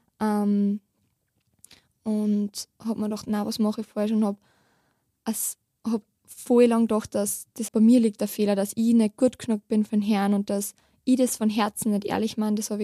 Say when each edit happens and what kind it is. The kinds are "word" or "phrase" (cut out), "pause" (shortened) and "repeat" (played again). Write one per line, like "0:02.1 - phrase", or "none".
0:07.7 - word